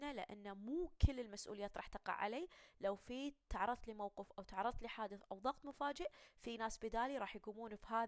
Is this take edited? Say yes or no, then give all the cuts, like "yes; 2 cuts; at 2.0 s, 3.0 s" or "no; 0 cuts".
no; 0 cuts